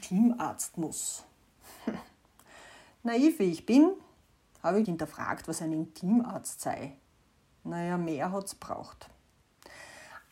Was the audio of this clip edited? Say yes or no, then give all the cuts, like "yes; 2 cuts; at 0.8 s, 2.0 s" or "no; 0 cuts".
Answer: yes; 1 cut; at 4.8 s